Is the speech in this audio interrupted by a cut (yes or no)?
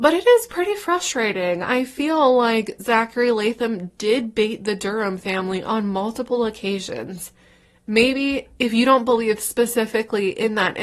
no